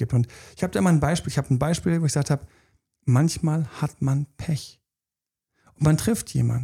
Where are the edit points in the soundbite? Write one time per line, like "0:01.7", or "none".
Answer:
none